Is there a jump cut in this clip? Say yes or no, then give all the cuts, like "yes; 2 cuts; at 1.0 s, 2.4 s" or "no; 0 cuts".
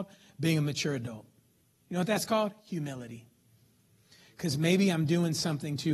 yes; 1 cut; at 1.6 s